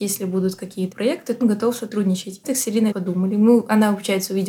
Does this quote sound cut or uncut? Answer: cut